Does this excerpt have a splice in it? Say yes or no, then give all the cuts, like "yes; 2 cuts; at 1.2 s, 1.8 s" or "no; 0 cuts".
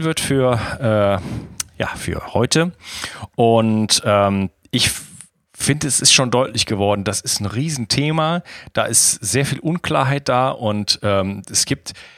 no; 0 cuts